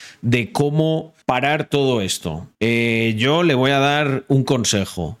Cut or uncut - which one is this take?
cut